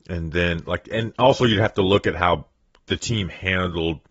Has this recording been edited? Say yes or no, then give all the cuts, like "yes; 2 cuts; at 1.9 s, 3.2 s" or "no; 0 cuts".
no; 0 cuts